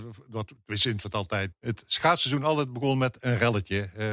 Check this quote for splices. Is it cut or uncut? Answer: cut